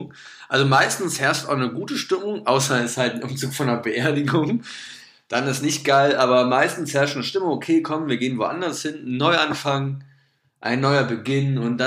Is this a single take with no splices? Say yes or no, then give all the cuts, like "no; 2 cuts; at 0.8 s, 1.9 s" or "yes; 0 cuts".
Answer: yes; 0 cuts